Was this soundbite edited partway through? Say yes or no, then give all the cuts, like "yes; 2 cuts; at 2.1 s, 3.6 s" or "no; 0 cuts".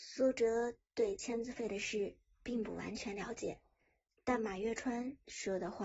no; 0 cuts